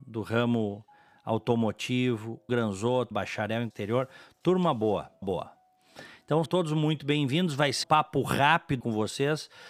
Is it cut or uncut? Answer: cut